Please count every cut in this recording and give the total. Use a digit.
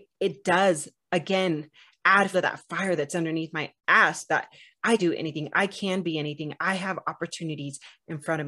3